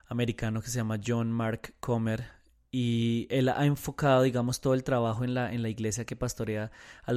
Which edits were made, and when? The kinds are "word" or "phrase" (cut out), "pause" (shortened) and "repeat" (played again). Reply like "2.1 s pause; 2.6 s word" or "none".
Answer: none